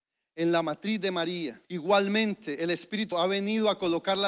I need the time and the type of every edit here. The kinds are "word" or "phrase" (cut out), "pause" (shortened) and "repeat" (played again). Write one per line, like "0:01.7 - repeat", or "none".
0:01.6 - pause
0:03.1 - word